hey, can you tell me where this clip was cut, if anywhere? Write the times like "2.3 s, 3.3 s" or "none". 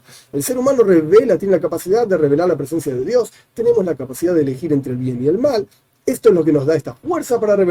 none